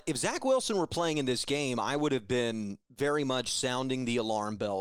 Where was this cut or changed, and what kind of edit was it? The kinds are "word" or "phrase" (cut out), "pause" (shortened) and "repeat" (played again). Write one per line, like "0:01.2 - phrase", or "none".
none